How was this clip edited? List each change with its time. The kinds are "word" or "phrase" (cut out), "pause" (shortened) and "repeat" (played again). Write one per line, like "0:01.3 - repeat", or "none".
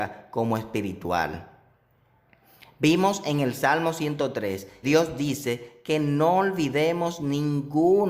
0:04.8 - word